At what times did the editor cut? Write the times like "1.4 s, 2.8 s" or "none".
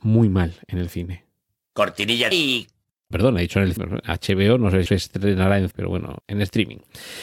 2.3 s, 3.1 s, 3.8 s, 4.9 s, 5.7 s, 6.2 s

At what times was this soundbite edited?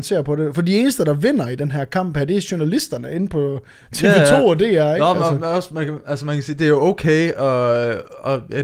none

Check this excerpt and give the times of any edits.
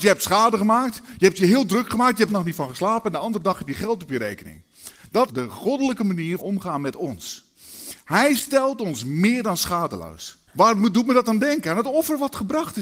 2.3 s, 5.3 s, 6.4 s, 10.5 s

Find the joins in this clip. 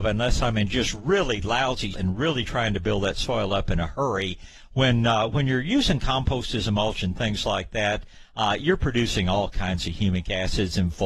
1.9 s

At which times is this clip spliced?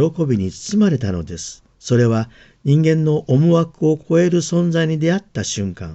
1.7 s

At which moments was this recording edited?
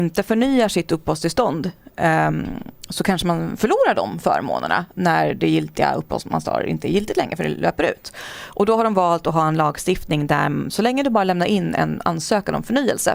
none

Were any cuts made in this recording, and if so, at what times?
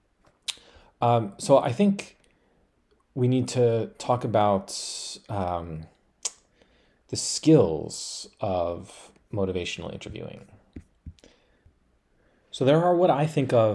none

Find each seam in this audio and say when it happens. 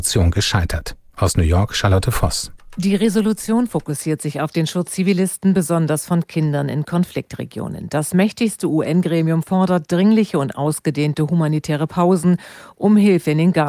4.9 s

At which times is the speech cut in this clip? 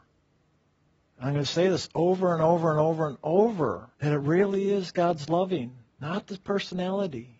3.9 s

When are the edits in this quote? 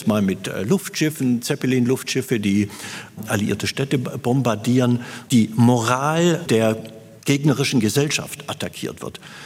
none

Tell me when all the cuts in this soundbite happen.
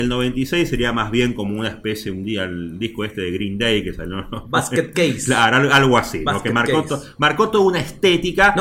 none

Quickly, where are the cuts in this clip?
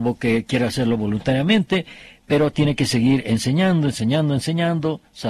none

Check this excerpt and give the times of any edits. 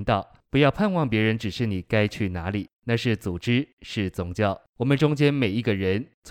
2.7 s, 4.7 s

